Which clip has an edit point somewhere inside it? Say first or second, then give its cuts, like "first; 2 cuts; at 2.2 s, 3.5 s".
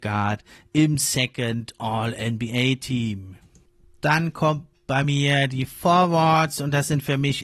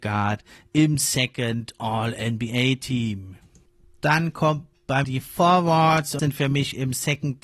second; 2 cuts; at 5.0 s, 6.2 s